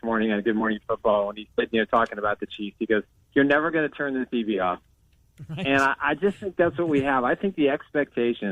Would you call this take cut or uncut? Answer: uncut